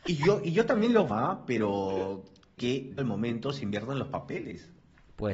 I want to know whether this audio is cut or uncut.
cut